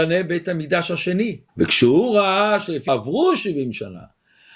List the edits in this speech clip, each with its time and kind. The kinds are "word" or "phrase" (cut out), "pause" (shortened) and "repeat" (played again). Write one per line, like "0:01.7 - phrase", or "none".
0:01.5 - pause
0:02.9 - phrase